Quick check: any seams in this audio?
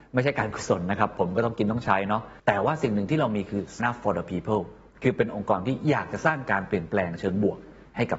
yes; 2 cuts; at 2.4 s, 3.8 s

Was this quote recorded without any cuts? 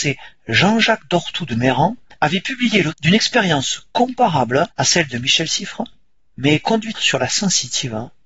no; 4 cuts; at 2.1 s, 2.9 s, 4.7 s, 6.9 s

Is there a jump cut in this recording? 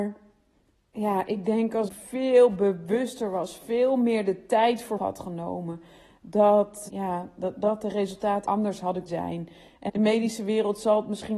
yes; 6 cuts; at 1.9 s, 5.0 s, 6.9 s, 8.4 s, 9.1 s, 9.9 s

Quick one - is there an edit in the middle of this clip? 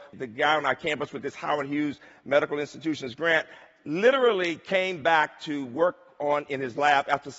no; 0 cuts

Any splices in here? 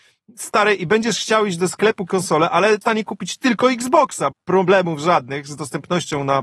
yes; 3 cuts; at 2.1 s, 2.8 s, 4.3 s

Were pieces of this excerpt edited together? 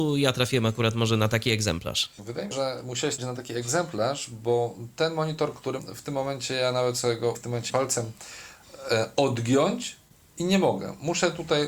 yes; 5 cuts; at 2.5 s, 3.2 s, 5.8 s, 7.3 s, 7.7 s

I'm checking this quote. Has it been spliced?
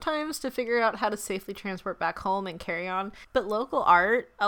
no; 0 cuts

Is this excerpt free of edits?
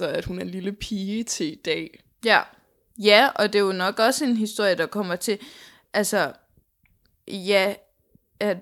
yes; 0 cuts

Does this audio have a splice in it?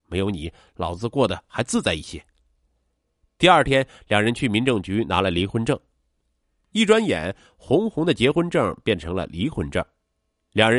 no; 0 cuts

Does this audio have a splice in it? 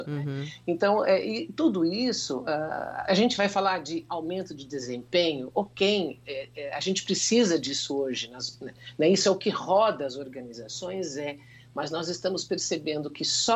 no; 0 cuts

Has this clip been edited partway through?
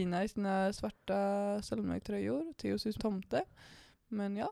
yes; 1 cut; at 3.0 s

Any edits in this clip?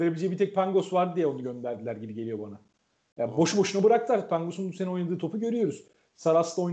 no; 0 cuts

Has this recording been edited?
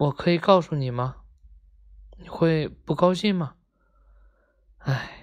no; 0 cuts

